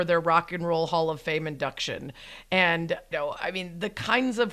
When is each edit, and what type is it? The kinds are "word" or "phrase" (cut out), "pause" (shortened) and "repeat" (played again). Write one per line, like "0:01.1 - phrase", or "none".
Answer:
0:03.1 - word